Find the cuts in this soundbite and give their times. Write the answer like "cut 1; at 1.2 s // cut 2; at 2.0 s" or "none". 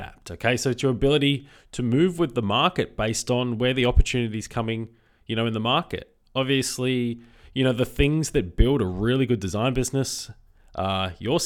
none